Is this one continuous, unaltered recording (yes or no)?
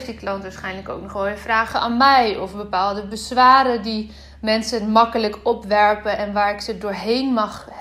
yes